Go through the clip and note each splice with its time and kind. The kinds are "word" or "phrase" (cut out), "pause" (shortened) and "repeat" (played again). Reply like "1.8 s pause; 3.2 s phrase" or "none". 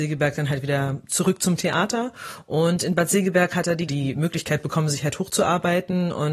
3.9 s phrase